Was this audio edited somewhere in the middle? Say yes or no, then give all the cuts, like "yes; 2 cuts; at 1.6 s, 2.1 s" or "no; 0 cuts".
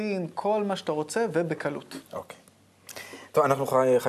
yes; 1 cut; at 2.1 s